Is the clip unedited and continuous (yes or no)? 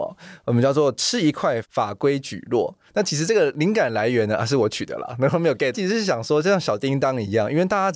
no